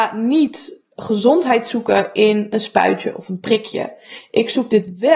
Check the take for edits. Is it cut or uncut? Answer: uncut